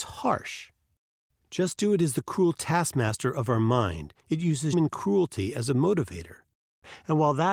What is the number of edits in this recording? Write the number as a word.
two